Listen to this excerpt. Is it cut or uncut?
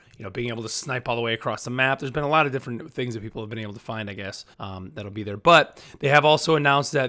cut